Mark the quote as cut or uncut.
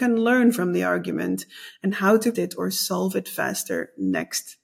cut